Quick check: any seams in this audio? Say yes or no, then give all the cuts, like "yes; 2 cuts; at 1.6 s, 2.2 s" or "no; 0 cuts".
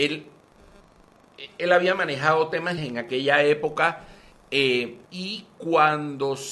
yes; 2 cuts; at 2.8 s, 5.0 s